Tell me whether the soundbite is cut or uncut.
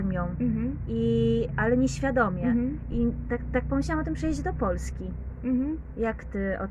uncut